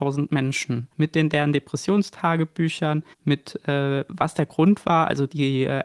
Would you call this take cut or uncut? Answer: cut